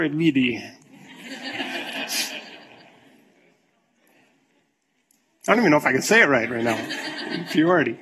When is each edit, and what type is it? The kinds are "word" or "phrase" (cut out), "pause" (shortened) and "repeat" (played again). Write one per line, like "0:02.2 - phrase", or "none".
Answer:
none